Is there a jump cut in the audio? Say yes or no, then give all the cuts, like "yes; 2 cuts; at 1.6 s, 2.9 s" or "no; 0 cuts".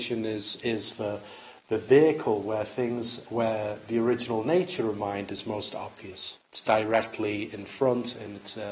yes; 2 cuts; at 3.2 s, 6.4 s